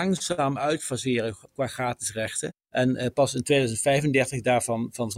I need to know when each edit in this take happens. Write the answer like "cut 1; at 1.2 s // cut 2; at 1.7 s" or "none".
cut 1; at 2.6 s